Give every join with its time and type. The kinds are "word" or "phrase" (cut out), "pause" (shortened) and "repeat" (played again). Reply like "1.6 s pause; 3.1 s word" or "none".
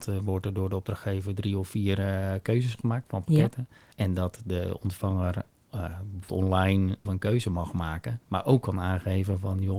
3.9 s pause; 6.3 s word; 7.0 s word; 8.2 s pause

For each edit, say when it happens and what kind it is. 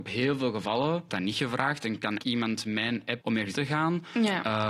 1.1 s word; 2.2 s word; 3.2 s word; 3.5 s word

